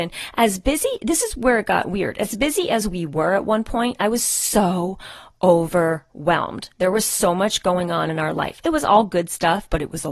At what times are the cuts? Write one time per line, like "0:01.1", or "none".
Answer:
none